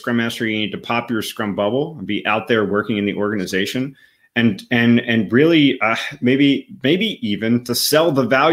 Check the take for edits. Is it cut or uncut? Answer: uncut